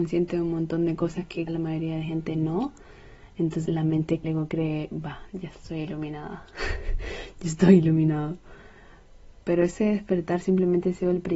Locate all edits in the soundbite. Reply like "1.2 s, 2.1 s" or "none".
1.5 s, 3.7 s, 4.2 s, 9.4 s

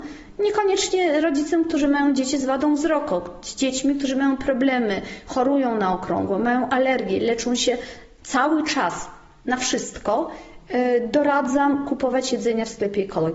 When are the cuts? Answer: none

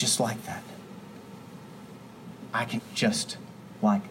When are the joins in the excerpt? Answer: 2.8 s

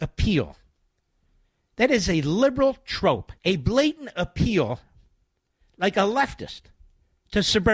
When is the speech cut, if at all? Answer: 3.4 s

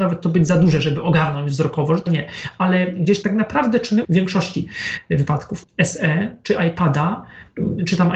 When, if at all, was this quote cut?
2.1 s, 3.2 s, 4.0 s, 5.6 s

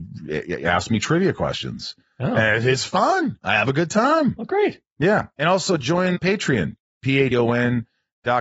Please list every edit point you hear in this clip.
6.1 s, 7.3 s

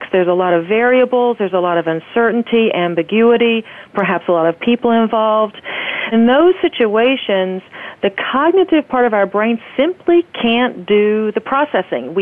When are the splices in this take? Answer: 6.1 s

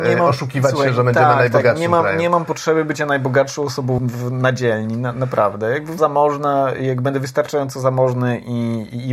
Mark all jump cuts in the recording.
4.0 s, 6.0 s

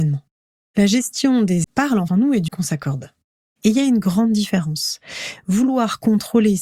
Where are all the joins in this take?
1.6 s, 2.1 s, 2.5 s

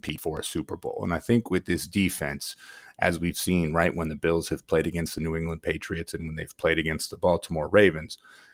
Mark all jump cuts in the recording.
none

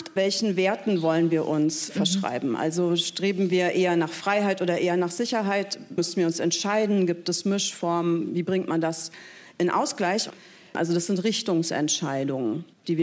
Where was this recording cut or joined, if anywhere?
none

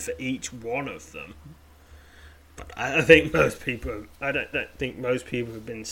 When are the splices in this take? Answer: 4.5 s

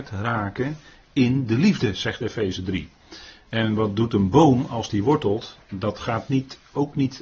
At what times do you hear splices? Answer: none

